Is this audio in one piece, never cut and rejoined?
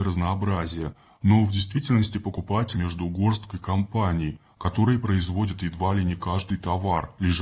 no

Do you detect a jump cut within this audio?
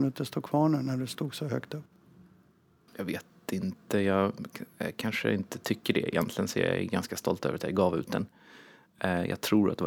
no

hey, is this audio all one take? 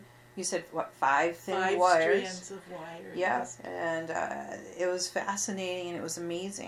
yes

